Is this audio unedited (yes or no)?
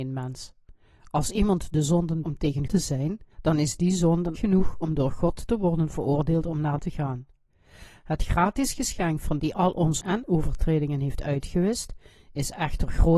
no